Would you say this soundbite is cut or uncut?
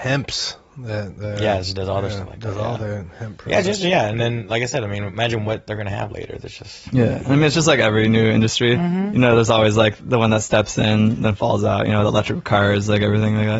uncut